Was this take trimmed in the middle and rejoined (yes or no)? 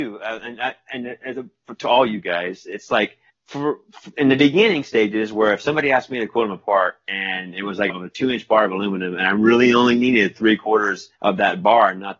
yes